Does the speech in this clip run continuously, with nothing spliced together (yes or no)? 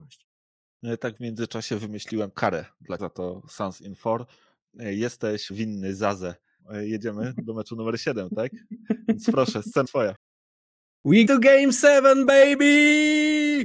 no